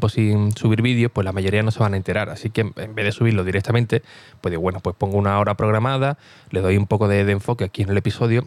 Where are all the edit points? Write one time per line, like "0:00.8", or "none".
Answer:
none

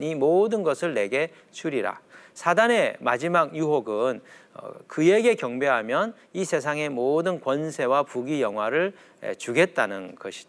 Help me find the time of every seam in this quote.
none

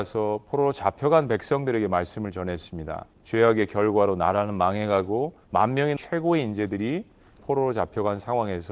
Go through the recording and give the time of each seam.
0:03.1
0:05.4
0:06.0
0:07.4

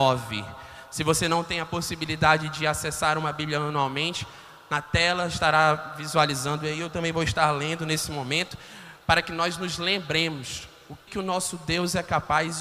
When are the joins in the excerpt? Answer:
0:11.1

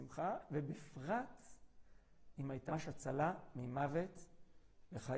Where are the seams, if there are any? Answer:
0:02.7

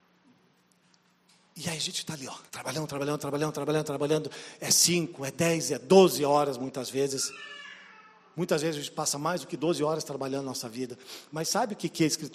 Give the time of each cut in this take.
0:02.5
0:03.5

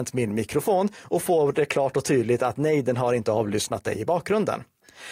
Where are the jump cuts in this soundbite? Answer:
none

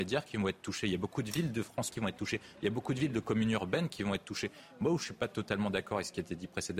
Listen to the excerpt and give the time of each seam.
0:01.9

